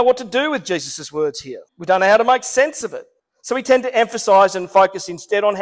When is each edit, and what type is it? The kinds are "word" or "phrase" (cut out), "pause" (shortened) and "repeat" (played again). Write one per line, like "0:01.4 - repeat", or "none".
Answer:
0:01.7 - pause
0:03.2 - pause